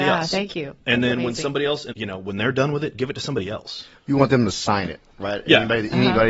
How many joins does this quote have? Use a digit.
1